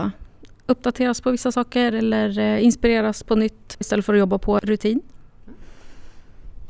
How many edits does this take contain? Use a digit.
1